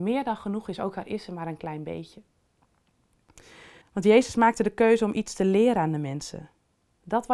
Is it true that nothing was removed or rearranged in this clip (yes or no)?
no